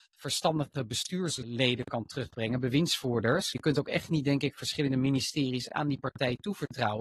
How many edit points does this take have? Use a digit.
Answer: 0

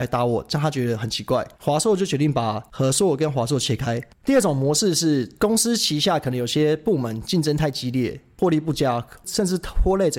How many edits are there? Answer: 1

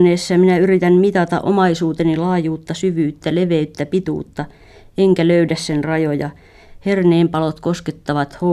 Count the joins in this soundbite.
0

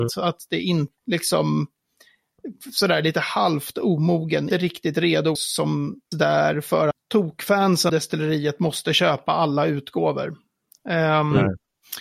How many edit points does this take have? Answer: 6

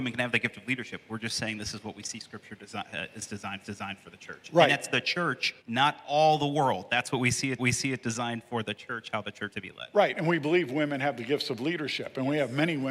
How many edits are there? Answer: 4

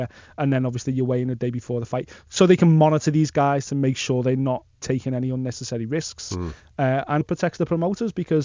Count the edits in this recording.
2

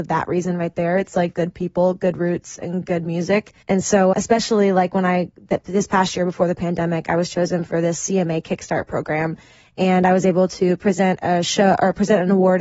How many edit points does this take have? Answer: 3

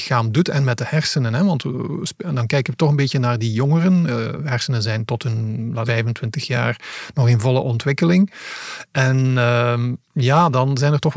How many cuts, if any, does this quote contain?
1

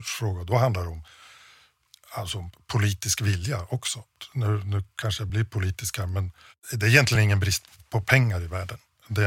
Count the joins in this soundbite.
0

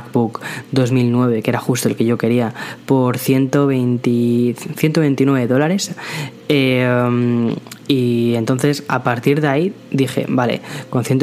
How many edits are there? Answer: 0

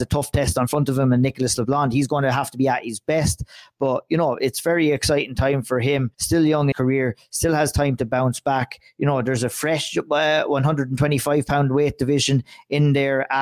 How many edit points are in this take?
2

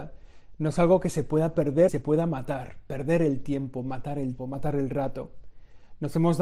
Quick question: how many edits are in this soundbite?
2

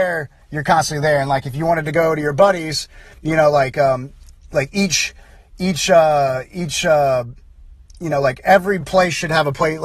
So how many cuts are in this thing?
0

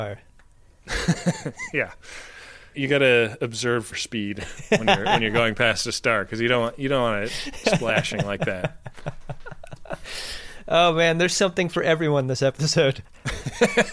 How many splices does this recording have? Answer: 1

